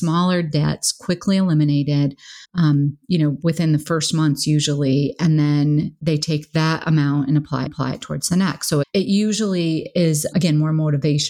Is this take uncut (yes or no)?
no